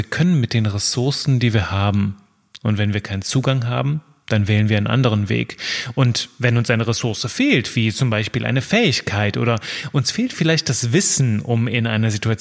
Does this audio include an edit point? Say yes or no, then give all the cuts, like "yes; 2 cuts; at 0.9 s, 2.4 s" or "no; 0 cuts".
no; 0 cuts